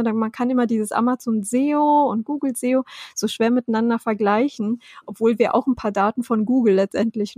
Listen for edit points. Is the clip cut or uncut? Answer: uncut